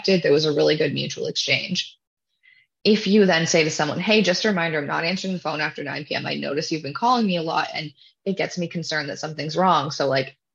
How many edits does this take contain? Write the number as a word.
zero